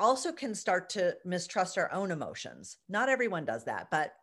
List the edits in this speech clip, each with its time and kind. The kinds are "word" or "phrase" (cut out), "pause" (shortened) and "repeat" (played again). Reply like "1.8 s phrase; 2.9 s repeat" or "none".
none